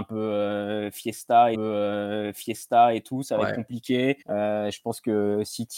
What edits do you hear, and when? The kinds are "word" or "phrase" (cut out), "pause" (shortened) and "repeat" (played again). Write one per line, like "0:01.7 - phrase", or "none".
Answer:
0:01.5 - repeat
0:04.2 - pause